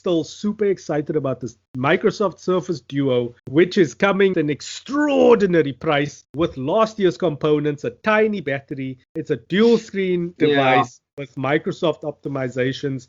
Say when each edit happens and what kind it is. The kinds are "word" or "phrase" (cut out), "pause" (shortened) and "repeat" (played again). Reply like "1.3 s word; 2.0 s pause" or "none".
1.7 s pause; 3.4 s pause; 4.3 s word; 6.2 s pause; 9.0 s pause; 10.4 s word

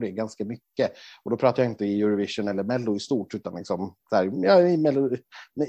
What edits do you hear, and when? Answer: none

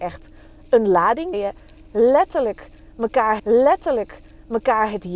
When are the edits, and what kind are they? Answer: 1.3 s word; 3.4 s repeat

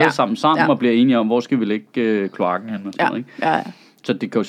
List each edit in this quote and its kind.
none

